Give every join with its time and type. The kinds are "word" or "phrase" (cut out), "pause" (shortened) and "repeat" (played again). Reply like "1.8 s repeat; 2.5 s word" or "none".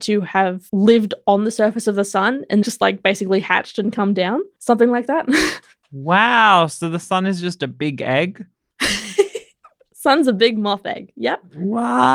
2.6 s word